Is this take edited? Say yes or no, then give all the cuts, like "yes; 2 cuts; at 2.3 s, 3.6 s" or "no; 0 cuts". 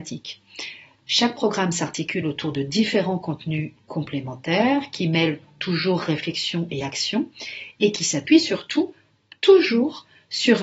no; 0 cuts